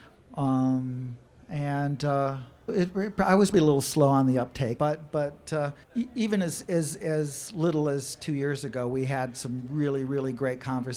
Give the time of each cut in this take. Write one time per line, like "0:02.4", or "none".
0:01.3
0:02.7
0:03.5
0:04.8
0:05.8